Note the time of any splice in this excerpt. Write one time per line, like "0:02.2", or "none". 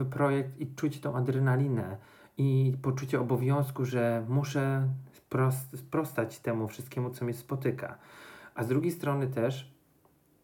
none